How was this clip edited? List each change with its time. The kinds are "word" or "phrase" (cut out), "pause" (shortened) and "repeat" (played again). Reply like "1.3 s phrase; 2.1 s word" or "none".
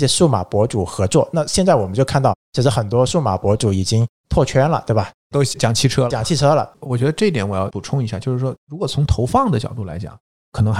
6.1 s word